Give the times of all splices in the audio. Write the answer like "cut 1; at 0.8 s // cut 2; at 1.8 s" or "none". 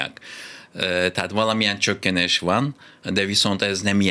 none